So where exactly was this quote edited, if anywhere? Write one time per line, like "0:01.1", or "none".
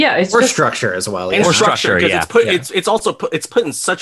none